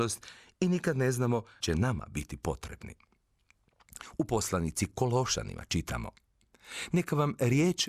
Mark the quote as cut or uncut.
cut